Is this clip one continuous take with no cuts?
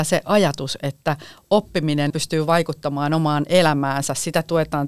no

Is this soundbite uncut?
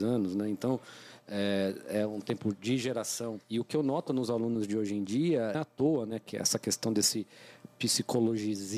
no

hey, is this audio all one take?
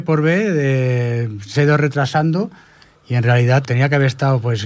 no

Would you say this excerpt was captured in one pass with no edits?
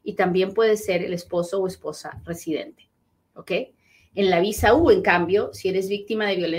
yes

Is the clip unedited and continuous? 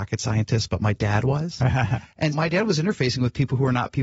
no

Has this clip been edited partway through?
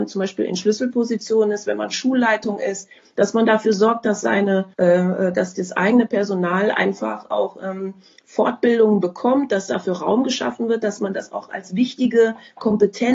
yes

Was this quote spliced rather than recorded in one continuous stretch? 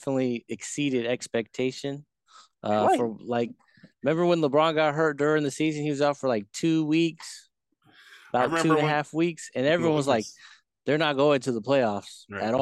no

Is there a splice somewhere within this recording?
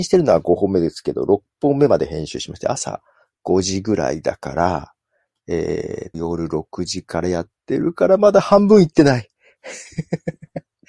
yes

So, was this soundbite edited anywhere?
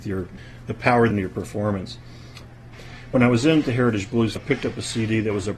yes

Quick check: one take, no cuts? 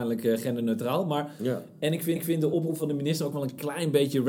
no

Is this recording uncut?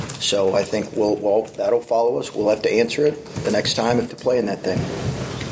no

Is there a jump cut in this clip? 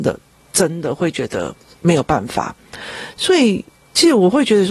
no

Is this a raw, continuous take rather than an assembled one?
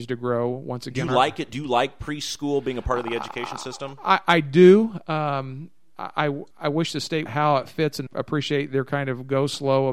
no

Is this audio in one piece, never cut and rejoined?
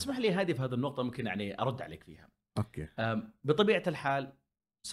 yes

